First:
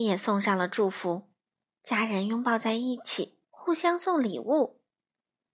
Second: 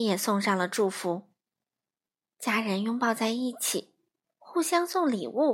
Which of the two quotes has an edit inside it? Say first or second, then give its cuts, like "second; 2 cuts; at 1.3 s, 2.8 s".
first; 2 cuts; at 1.7 s, 3.4 s